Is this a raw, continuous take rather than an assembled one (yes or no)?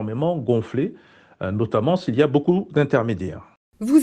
yes